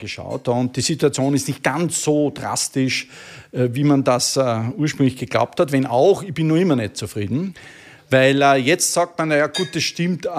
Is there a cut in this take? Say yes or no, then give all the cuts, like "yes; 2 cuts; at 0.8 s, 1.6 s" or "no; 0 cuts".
no; 0 cuts